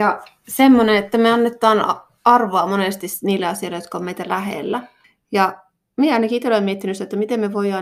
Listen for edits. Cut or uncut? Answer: cut